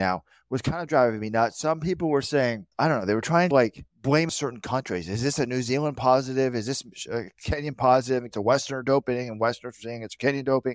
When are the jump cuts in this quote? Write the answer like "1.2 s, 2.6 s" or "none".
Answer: 2.7 s, 3.5 s, 3.9 s, 4.3 s, 8.3 s